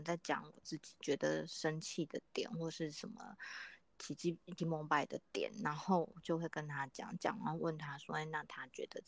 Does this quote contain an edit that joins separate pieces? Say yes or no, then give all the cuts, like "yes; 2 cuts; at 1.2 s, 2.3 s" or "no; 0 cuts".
yes; 1 cut; at 4.6 s